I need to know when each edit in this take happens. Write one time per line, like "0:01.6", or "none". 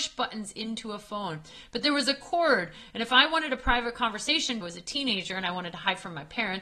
0:04.6